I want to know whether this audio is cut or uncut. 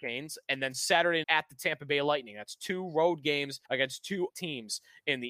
cut